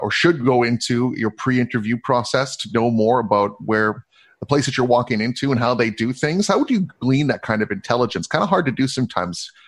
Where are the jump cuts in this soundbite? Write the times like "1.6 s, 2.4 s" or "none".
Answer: none